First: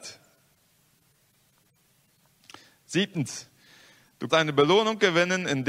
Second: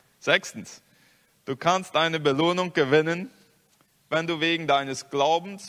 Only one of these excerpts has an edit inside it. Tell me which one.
first; 1 cut; at 4.3 s

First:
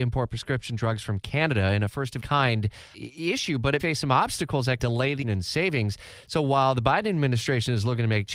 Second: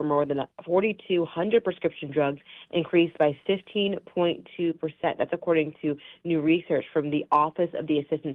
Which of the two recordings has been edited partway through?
first; 5 cuts; at 2.2 s, 2.9 s, 3.8 s, 4.8 s, 5.2 s

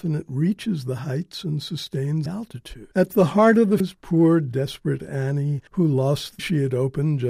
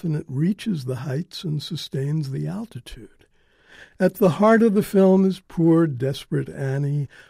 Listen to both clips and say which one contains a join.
first; 5 cuts; at 2.3 s, 2.9 s, 3.8 s, 5.7 s, 6.4 s

